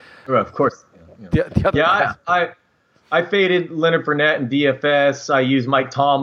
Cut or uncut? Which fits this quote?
uncut